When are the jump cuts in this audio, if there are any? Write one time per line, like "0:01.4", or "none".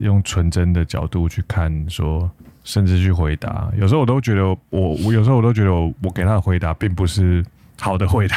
0:02.4